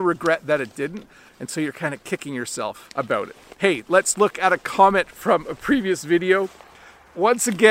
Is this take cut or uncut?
cut